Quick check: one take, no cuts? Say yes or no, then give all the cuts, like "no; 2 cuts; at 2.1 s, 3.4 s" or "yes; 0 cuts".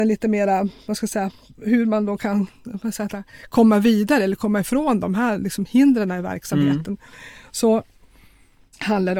yes; 0 cuts